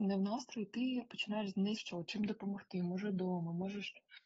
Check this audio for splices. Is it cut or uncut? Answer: cut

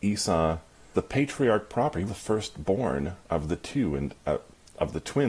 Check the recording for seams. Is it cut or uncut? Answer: cut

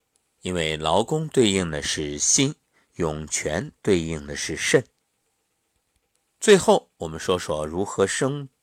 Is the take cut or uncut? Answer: uncut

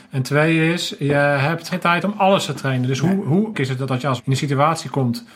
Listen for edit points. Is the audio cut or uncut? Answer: cut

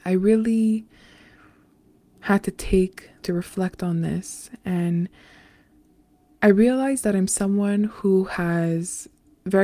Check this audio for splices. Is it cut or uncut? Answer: cut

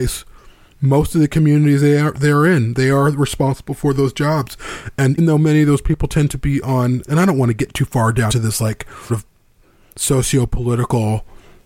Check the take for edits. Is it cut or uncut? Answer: cut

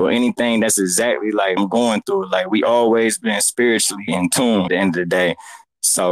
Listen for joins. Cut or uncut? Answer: cut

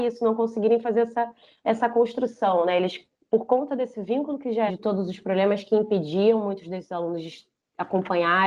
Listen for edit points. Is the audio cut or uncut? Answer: cut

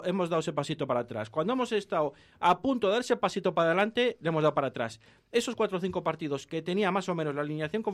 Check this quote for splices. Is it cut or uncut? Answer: uncut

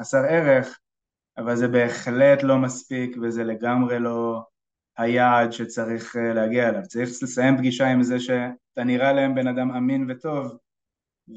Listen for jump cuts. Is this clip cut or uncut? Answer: uncut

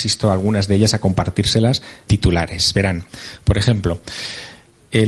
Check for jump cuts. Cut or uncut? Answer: cut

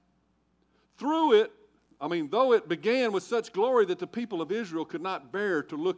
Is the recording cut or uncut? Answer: cut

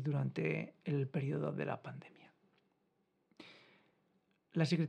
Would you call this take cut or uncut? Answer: uncut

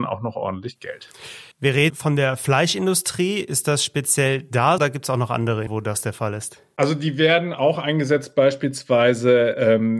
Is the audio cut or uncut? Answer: cut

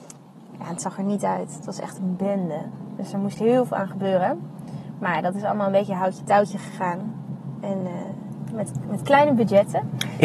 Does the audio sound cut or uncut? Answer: uncut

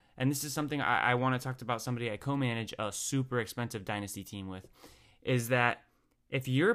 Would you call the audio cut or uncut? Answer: uncut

